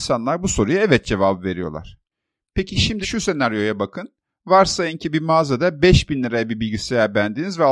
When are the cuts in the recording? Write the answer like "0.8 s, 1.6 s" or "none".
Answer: 3.0 s